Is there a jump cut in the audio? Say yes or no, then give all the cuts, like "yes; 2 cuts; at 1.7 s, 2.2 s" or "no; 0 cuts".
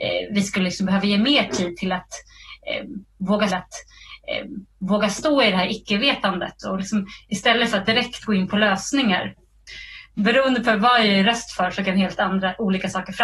yes; 2 cuts; at 3.5 s, 10.1 s